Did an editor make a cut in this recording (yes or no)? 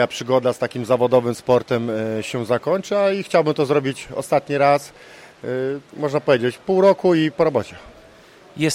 yes